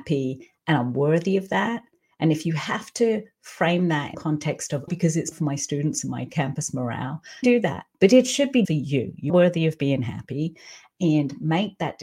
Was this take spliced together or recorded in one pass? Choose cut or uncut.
cut